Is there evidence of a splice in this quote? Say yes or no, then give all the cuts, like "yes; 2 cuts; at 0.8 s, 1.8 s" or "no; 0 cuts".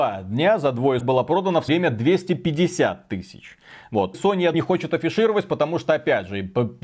yes; 4 cuts; at 1.0 s, 1.7 s, 4.1 s, 4.5 s